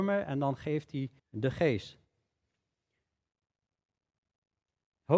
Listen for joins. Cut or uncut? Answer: cut